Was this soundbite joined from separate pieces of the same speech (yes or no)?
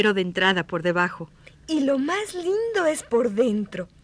no